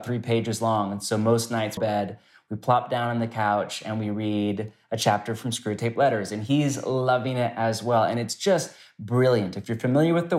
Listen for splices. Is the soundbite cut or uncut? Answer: cut